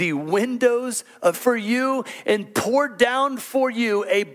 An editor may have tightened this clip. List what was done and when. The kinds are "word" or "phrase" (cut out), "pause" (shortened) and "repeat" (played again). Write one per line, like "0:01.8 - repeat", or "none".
0:01.3 - word